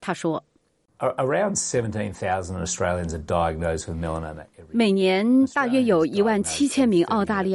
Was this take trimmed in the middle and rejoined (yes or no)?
no